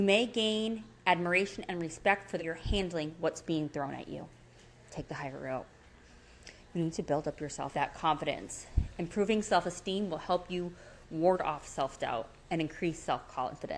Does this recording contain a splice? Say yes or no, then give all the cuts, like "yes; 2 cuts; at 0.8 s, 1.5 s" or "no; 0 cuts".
yes; 2 cuts; at 2.4 s, 7.7 s